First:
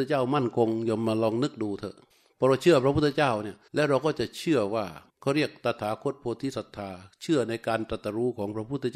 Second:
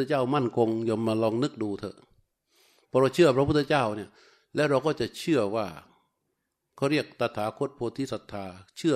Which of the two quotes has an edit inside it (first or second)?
first